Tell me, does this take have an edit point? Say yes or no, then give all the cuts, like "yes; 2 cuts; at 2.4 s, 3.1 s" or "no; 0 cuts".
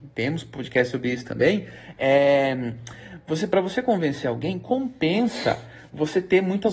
no; 0 cuts